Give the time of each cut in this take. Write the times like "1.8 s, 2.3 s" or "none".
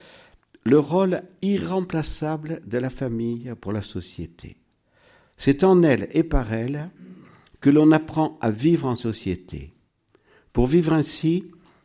none